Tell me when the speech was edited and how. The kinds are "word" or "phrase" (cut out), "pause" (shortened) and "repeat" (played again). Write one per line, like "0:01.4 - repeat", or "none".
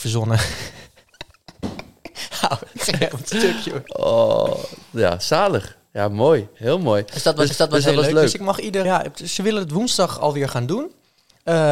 0:07.5 - repeat
0:08.8 - word